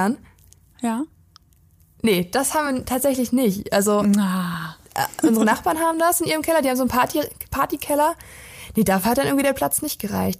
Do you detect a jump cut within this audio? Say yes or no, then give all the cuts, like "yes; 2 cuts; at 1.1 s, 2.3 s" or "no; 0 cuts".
no; 0 cuts